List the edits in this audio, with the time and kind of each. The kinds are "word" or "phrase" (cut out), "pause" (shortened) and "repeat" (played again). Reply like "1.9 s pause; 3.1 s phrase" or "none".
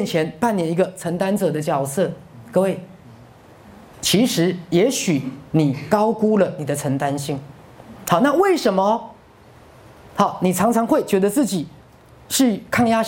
none